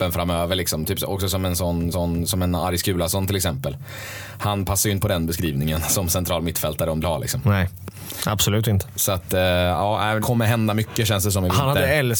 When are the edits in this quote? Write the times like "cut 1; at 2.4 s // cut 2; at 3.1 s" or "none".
cut 1; at 1.9 s // cut 2; at 5.0 s // cut 3; at 7.0 s // cut 4; at 10.2 s